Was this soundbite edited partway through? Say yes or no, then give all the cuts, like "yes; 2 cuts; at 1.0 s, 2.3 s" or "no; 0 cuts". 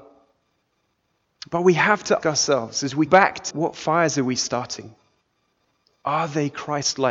yes; 3 cuts; at 2.2 s, 3.1 s, 3.5 s